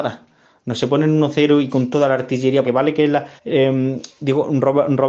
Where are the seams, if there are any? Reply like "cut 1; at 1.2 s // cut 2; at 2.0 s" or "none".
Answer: cut 1; at 2.6 s // cut 2; at 3.4 s